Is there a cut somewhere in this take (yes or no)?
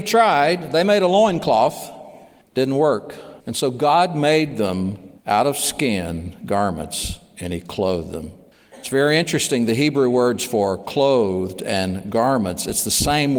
yes